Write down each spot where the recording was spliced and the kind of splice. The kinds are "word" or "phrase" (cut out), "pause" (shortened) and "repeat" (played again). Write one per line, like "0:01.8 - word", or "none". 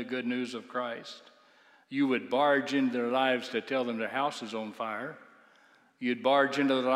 none

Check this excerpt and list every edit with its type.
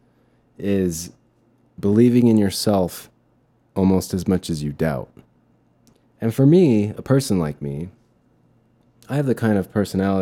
none

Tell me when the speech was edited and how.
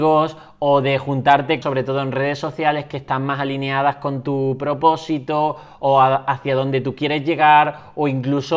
0:01.6 - phrase

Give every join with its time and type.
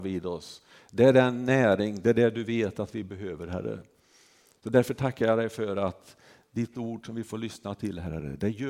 none

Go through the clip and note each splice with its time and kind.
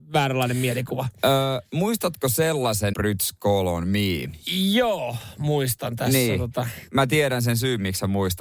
0:02.9 - phrase

